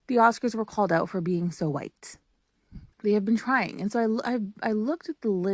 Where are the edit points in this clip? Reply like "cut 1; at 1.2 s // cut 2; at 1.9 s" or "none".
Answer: cut 1; at 2.9 s